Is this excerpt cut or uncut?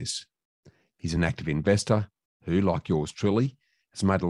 uncut